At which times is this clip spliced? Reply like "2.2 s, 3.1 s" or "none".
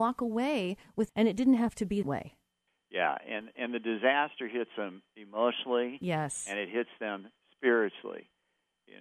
1.1 s, 2.0 s, 2.7 s